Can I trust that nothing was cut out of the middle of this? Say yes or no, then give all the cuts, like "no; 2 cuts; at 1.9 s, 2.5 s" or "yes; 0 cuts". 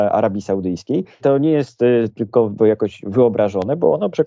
no; 2 cuts; at 1.2 s, 2.6 s